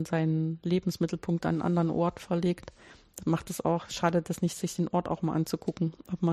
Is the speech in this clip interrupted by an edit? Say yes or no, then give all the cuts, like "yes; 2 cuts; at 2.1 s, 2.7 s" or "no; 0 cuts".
no; 0 cuts